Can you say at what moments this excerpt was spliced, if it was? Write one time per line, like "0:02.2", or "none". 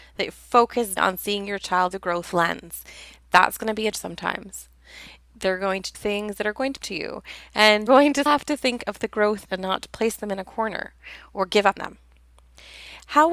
0:01.0
0:01.9
0:03.9
0:05.9
0:06.8
0:07.9
0:08.3
0:09.5
0:11.8